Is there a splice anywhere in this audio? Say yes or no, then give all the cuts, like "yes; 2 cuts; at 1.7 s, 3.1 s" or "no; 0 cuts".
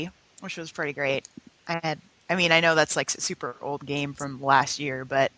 no; 0 cuts